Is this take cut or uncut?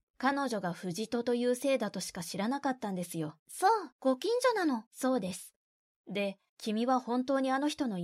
cut